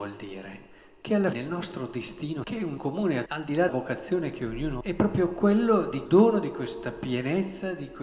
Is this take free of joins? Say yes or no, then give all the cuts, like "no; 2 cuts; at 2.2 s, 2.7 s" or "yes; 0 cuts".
no; 7 cuts; at 1.3 s, 2.4 s, 2.8 s, 3.3 s, 3.7 s, 4.8 s, 6.1 s